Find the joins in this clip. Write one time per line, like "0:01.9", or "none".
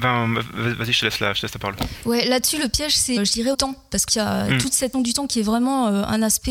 0:03.2
0:03.5
0:04.1
0:04.9